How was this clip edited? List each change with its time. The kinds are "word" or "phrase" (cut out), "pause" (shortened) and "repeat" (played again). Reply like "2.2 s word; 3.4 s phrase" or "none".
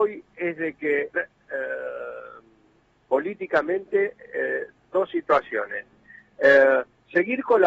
1.2 s phrase; 4.8 s word